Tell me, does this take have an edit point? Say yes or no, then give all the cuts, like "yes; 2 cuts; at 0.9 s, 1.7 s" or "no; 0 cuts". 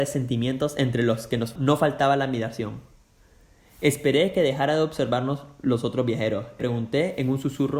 yes; 2 cuts; at 1.6 s, 6.6 s